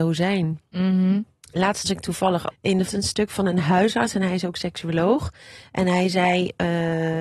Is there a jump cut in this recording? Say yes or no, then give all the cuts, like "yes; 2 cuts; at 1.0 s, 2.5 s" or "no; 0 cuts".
yes; 3 cuts; at 1.8 s, 2.5 s, 2.9 s